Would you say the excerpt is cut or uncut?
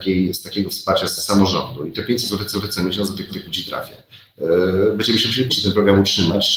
cut